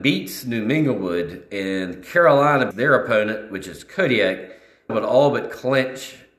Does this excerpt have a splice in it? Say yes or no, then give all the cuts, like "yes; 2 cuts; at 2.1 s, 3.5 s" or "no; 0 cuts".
yes; 2 cuts; at 2.7 s, 4.9 s